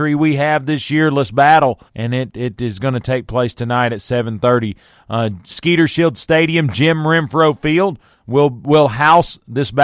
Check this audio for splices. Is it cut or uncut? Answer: cut